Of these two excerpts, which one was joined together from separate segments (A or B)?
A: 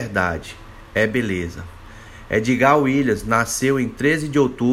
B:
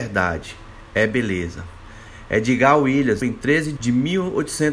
B